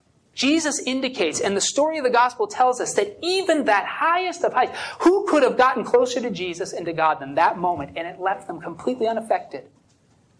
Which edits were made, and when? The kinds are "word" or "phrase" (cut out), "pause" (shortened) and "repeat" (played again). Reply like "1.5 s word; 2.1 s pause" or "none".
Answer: none